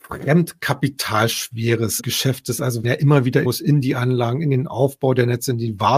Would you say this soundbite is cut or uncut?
cut